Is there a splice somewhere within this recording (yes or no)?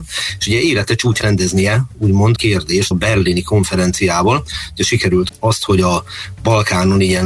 yes